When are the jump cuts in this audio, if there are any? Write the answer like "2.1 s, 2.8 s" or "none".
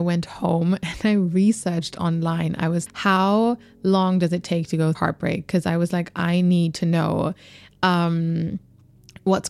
2.9 s, 4.9 s